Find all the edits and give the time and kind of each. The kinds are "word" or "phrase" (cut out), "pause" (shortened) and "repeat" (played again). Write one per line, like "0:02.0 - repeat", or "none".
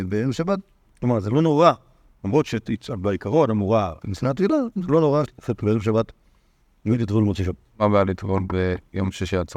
0:04.0 - word
0:05.3 - word